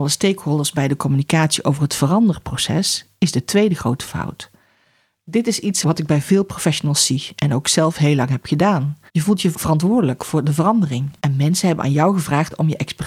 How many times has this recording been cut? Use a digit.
2